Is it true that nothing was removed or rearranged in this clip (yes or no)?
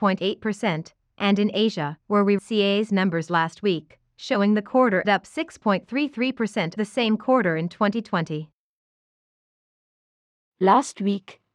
no